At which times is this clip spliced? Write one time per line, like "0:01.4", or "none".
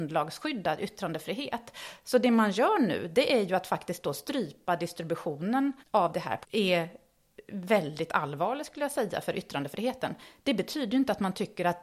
0:05.8
0:06.4

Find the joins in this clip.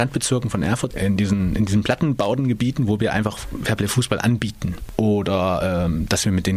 0:00.9

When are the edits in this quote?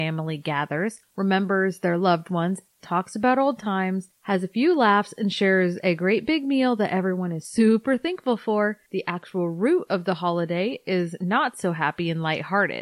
none

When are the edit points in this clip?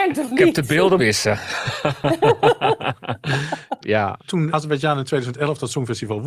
0:01.0
0:03.8
0:04.5

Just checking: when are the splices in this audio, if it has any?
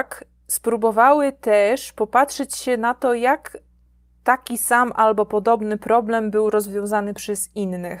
none

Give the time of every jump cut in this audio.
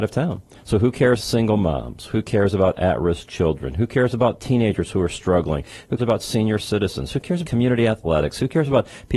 0:01.2
0:06.0
0:07.4

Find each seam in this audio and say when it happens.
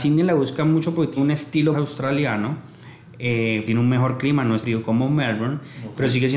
0:01.2
0:01.7
0:03.7
0:04.6

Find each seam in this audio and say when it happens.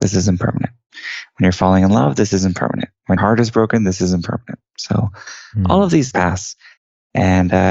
0:03.2
0:06.1

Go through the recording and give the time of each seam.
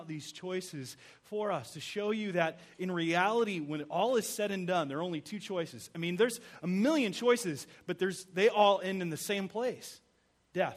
none

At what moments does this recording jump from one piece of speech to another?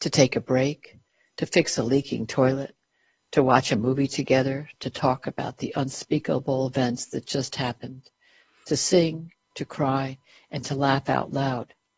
none

